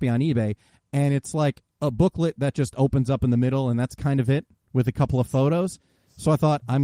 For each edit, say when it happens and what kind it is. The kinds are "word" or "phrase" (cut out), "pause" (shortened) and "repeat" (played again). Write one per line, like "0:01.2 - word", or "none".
none